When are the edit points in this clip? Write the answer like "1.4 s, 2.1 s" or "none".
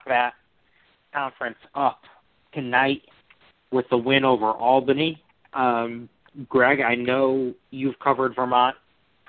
7.6 s